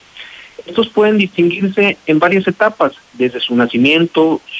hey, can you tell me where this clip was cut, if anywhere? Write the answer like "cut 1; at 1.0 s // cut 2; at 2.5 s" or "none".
cut 1; at 3.0 s